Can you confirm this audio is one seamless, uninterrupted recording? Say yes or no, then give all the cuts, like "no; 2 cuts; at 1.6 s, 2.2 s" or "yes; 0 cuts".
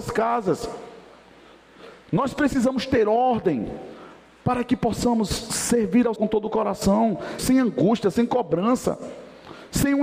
no; 2 cuts; at 6.2 s, 7.4 s